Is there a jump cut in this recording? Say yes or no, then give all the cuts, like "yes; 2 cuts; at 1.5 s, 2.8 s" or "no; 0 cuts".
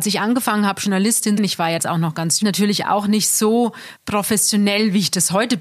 yes; 4 cuts; at 1.4 s, 1.8 s, 2.4 s, 4.0 s